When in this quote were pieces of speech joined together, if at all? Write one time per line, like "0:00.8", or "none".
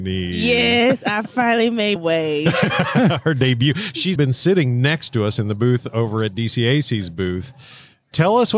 0:02.0
0:04.2